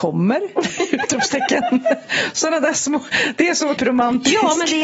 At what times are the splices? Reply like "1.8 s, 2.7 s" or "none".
3.8 s